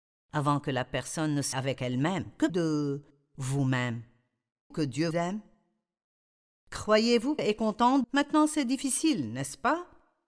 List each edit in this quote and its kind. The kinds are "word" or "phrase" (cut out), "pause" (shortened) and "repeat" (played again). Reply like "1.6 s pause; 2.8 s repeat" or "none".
1.5 s word; 2.5 s word; 4.7 s word; 5.1 s word; 7.4 s word; 8.0 s word